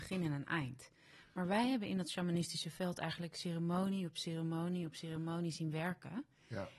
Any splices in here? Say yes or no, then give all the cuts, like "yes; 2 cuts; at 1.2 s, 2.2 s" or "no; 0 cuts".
no; 0 cuts